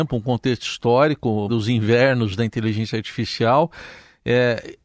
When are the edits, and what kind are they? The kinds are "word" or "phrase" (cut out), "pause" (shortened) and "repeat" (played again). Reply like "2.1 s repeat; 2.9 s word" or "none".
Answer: 1.5 s word